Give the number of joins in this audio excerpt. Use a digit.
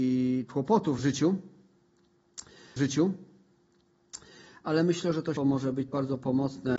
4